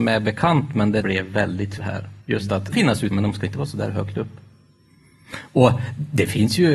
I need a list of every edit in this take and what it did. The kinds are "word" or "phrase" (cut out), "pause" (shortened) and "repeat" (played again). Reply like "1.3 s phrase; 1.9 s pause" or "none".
1.0 s phrase; 1.8 s word; 2.2 s pause; 2.7 s phrase; 3.1 s phrase